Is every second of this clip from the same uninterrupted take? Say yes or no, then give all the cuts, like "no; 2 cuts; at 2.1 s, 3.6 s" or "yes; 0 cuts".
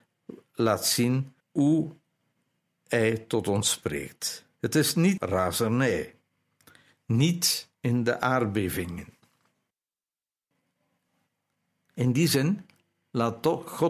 no; 4 cuts; at 1.4 s, 4.5 s, 5.2 s, 7.7 s